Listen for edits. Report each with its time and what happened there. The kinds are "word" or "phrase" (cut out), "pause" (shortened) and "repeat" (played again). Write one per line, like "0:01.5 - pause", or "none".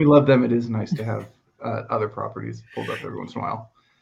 none